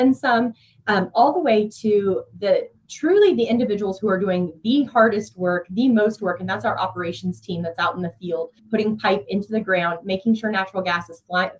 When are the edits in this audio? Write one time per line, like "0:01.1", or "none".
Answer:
0:08.6